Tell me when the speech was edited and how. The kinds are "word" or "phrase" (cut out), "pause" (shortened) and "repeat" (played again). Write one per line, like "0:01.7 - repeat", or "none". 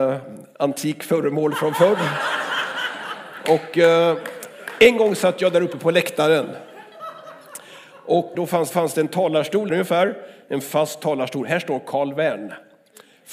0:08.3 - phrase
0:08.7 - repeat
0:09.7 - phrase